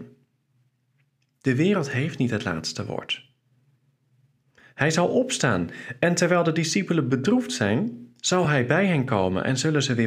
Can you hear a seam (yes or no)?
no